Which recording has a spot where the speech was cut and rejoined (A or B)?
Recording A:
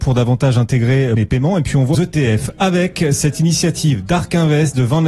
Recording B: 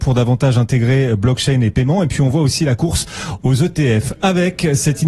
A